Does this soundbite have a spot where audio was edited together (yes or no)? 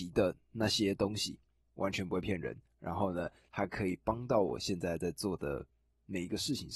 no